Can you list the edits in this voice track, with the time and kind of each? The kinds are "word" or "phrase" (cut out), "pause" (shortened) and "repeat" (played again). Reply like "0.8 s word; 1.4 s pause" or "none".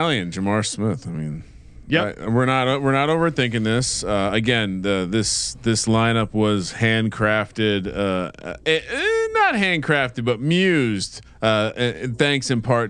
11.3 s pause